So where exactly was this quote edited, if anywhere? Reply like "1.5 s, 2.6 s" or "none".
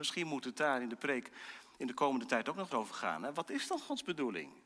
2.7 s